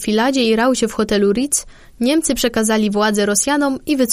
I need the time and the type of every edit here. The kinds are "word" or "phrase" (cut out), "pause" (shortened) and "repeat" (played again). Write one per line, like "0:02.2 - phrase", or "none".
none